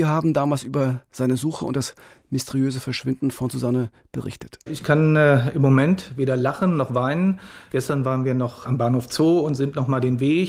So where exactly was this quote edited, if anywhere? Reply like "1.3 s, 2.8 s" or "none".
none